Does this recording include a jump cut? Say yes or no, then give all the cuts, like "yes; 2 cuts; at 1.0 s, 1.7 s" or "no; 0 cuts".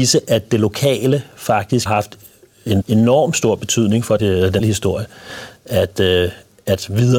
yes; 4 cuts; at 1.9 s, 2.8 s, 4.2 s, 4.6 s